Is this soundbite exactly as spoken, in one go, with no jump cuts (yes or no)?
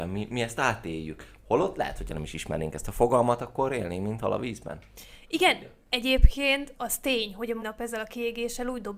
no